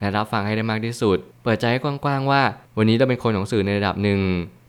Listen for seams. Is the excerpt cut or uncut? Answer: uncut